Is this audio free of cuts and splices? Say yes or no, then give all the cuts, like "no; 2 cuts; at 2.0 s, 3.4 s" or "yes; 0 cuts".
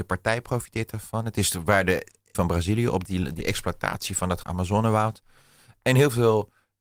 no; 4 cuts; at 2.3 s, 3.0 s, 3.4 s, 4.4 s